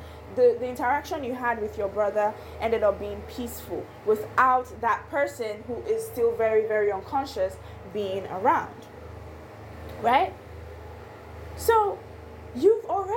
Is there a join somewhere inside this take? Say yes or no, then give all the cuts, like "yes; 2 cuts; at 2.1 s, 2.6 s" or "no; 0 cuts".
no; 0 cuts